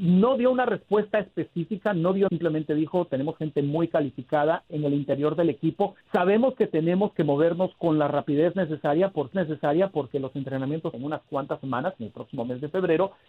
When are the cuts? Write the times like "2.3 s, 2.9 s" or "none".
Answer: 2.3 s, 4.7 s, 6.0 s, 9.3 s, 10.9 s